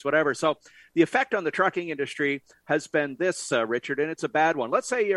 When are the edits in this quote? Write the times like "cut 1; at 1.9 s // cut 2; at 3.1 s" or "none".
none